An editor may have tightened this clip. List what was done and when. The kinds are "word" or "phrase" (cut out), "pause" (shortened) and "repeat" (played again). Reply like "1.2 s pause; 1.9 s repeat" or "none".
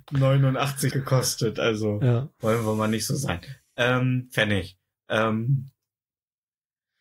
0.9 s word